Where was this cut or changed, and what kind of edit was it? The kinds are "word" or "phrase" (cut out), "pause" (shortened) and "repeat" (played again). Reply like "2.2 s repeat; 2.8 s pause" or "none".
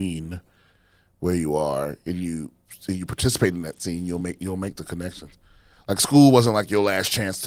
none